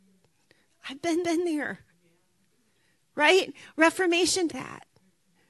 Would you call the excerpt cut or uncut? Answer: cut